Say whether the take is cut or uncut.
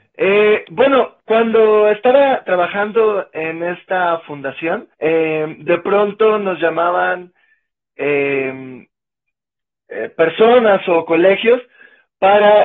cut